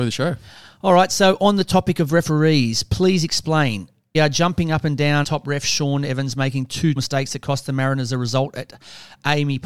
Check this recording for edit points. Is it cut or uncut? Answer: cut